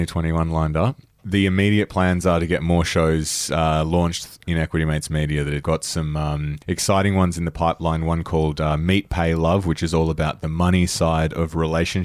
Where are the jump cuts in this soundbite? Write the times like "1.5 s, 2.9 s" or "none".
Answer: 6.6 s